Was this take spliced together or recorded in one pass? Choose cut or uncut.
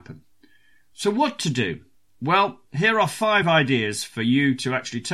uncut